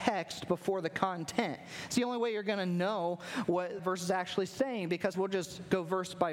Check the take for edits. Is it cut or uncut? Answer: cut